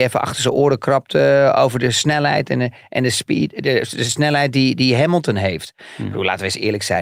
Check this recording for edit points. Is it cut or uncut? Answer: uncut